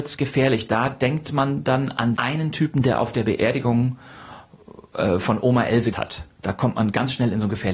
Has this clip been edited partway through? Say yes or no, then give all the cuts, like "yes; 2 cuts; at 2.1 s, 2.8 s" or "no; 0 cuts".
yes; 2 cuts; at 2.2 s, 5.9 s